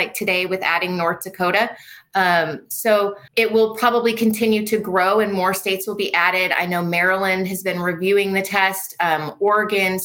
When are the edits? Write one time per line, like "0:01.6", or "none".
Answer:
0:03.3

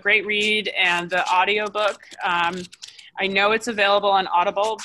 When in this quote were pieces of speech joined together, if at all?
none

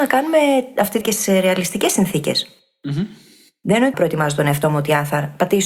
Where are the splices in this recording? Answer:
0:01.0
0:03.9

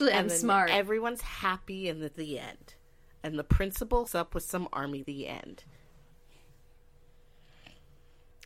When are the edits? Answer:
0:02.1
0:04.1
0:05.0

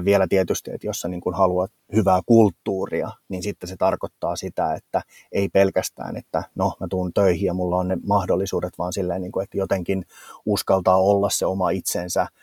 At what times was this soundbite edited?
none

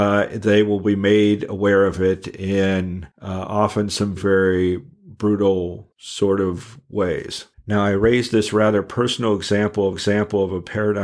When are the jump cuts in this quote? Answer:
0:03.1
0:04.2
0:05.9
0:07.5
0:09.9

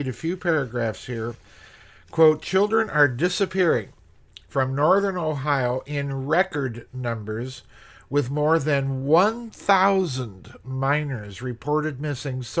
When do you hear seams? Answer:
none

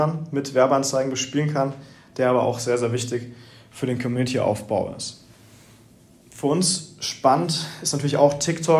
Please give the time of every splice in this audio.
none

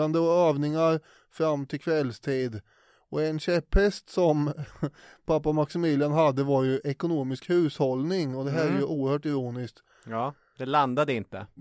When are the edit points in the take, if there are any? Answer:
none

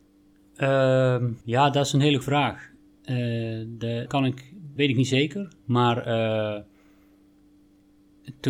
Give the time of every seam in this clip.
0:01.4
0:02.2
0:04.1
0:04.8
0:05.6

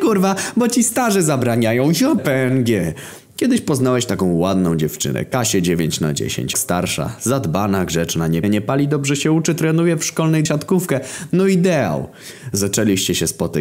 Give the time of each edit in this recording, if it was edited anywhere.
0:02.2
0:06.5
0:08.4
0:10.4

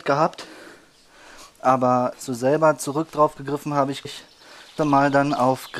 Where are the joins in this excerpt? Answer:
0:02.1
0:04.0
0:04.8

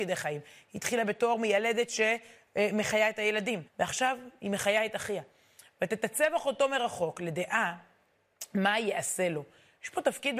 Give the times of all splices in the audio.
0:03.7

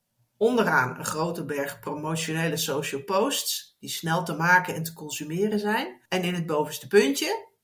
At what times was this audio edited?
0:06.0

